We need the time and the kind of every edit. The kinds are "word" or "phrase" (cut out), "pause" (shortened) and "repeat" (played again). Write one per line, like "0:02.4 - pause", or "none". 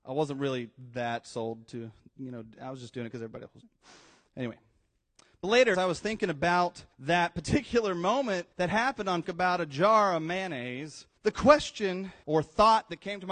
0:03.6 - word
0:05.7 - word
0:06.9 - pause
0:08.5 - pause
0:09.2 - word
0:11.2 - pause
0:12.2 - word